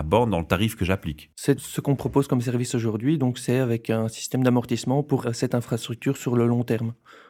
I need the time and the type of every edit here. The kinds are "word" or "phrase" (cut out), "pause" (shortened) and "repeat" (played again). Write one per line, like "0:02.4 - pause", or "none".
0:05.2 - word

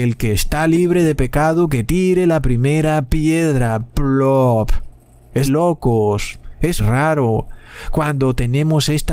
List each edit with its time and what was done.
0:05.4 - word
0:06.8 - word

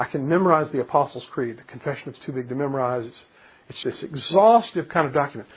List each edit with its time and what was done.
0:02.1 - word
0:03.8 - word

